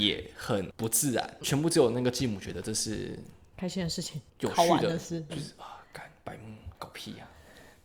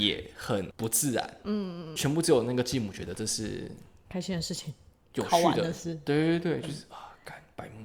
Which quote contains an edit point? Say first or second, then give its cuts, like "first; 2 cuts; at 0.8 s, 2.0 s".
first; 4 cuts; at 1.4 s, 4.3 s, 5.3 s, 6.7 s